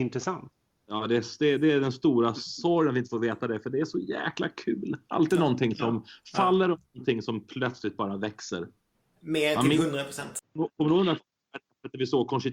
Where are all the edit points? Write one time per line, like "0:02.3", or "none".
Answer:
0:05.0
0:08.9